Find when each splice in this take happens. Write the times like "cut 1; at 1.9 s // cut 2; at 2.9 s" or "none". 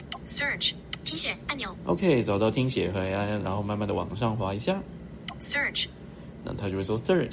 none